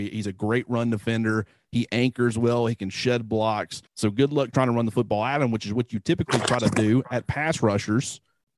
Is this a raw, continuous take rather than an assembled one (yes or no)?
no